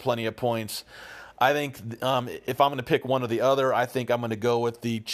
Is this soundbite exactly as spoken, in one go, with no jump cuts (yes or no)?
yes